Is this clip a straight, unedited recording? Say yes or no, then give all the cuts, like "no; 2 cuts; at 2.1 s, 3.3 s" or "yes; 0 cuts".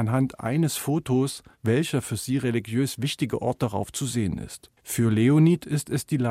no; 1 cut; at 4.8 s